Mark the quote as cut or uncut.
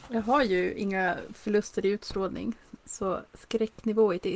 uncut